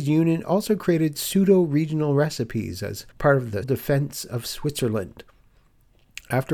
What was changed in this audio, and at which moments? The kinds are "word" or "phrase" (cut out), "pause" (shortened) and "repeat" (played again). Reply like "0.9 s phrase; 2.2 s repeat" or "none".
3.1 s pause; 3.6 s word